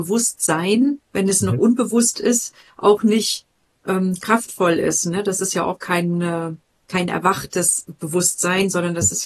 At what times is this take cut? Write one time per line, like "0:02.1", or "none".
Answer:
none